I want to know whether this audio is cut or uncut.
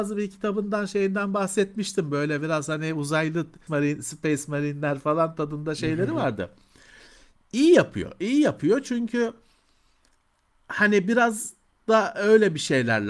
cut